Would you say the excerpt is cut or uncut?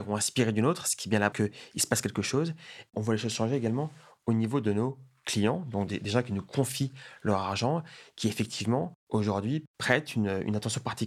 cut